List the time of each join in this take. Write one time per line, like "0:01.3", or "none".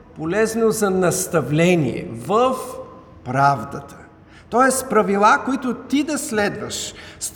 none